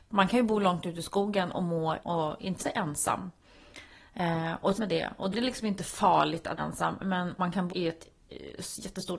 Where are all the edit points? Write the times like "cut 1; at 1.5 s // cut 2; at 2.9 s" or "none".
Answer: cut 1; at 2.0 s // cut 2; at 2.6 s // cut 3; at 4.7 s // cut 4; at 5.3 s // cut 5; at 6.6 s // cut 6; at 7.4 s // cut 7; at 7.7 s